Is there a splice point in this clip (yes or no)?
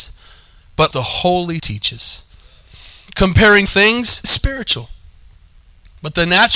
yes